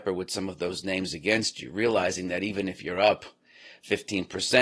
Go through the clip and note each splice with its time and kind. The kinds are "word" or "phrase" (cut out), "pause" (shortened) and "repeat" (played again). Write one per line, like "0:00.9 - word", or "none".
none